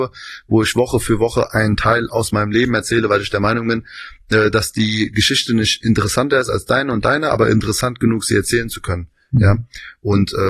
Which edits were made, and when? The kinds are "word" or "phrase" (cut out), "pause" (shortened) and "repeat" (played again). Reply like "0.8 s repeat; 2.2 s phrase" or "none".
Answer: none

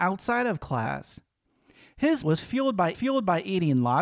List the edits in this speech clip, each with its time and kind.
2.2 s word; 2.9 s repeat

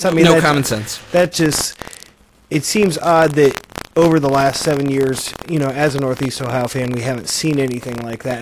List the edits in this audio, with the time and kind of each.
none

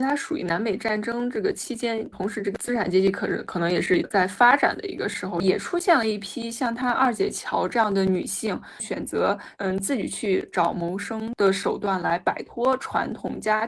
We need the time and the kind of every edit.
2.1 s word; 9.5 s pause

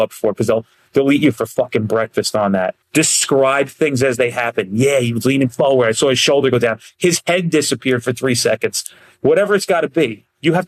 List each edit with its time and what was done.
2.8 s pause

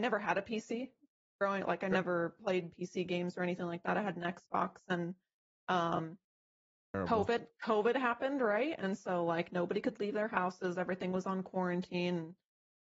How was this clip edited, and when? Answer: none

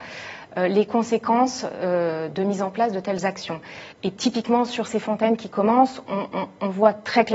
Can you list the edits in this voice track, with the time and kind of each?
3.9 s pause

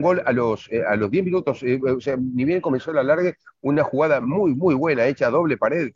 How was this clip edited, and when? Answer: none

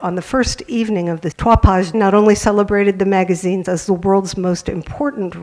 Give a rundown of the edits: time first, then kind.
1.3 s word; 1.9 s word; 3.6 s word

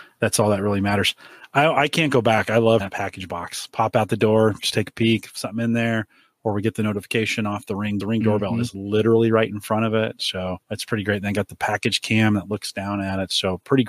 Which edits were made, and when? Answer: 2.8 s word; 8.0 s phrase; 10.6 s pause

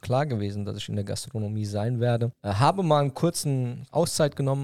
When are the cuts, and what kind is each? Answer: none

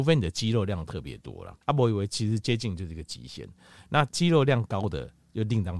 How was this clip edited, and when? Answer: 1.6 s pause

